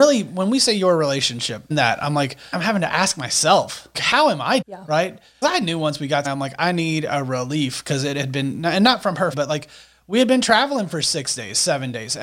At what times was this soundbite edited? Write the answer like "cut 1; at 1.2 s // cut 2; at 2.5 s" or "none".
cut 1; at 1.7 s // cut 2; at 2.5 s // cut 3; at 3.9 s // cut 4; at 4.6 s // cut 5; at 5.4 s // cut 6; at 6.2 s // cut 7; at 9.3 s